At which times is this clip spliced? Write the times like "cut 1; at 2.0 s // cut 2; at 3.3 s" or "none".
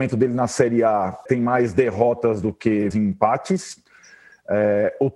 cut 1; at 1.3 s // cut 2; at 2.9 s

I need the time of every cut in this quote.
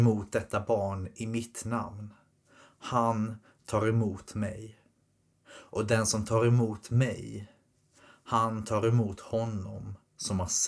none

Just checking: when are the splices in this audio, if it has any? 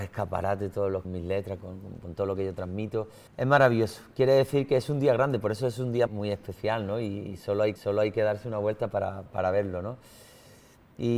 cut 1; at 1.0 s // cut 2; at 1.6 s // cut 3; at 3.3 s // cut 4; at 6.1 s // cut 5; at 7.8 s // cut 6; at 9.3 s

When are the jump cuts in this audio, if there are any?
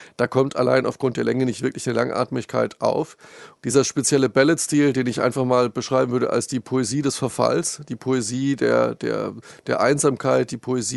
none

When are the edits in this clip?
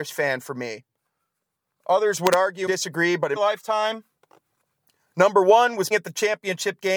cut 1; at 2.7 s // cut 2; at 3.4 s // cut 3; at 5.9 s

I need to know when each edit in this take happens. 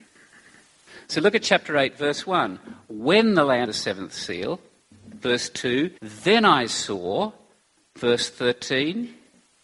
cut 1; at 3.6 s // cut 2; at 6.0 s

